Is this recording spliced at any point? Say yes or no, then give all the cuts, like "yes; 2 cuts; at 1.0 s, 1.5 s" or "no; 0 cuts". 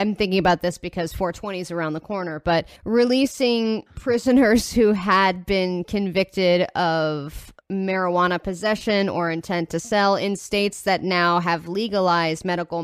yes; 2 cuts; at 2.8 s, 7.6 s